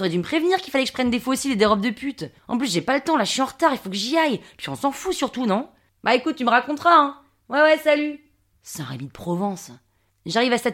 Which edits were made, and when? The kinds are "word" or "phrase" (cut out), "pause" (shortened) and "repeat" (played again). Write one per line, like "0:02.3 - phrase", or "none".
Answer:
none